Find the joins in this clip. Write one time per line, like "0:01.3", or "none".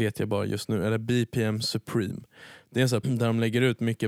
0:03.0